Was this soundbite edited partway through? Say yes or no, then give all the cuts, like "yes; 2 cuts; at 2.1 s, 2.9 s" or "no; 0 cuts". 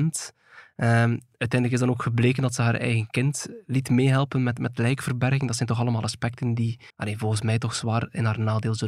yes; 1 cut; at 6.9 s